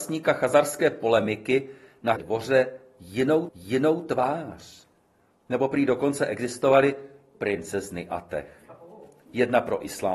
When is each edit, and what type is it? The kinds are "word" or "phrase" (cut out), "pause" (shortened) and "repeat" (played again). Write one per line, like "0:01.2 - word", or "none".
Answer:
0:02.2 - word
0:03.5 - repeat
0:07.3 - word